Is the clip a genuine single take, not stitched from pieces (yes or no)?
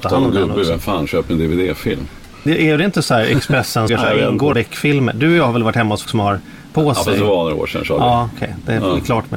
no